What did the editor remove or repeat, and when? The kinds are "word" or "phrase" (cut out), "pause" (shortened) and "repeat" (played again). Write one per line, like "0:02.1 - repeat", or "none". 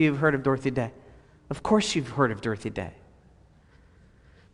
none